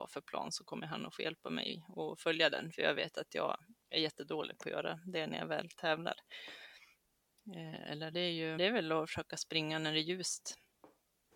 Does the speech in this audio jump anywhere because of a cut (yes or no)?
yes